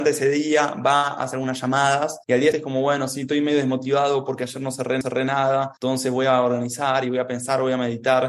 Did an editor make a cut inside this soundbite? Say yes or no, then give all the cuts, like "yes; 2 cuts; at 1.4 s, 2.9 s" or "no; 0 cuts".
yes; 2 cuts; at 2.5 s, 5.0 s